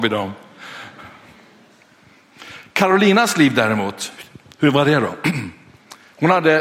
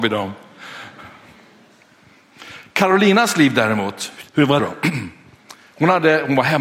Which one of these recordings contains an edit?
second; 2 cuts; at 4.3 s, 4.6 s

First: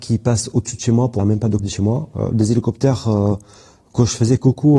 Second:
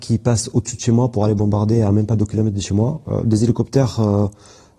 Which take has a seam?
first; 2 cuts; at 1.2 s, 1.6 s

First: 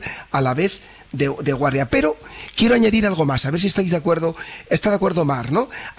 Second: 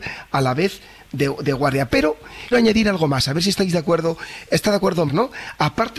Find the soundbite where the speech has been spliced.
second; 2 cuts; at 2.5 s, 5.1 s

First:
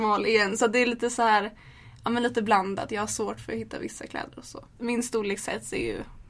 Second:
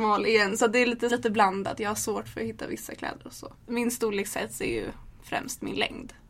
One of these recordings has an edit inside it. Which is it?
second; 1 cut; at 1.1 s

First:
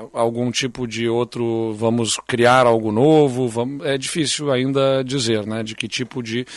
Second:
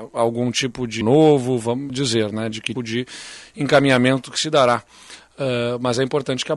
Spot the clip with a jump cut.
second; 3 cuts; at 1.0 s, 1.9 s, 2.8 s

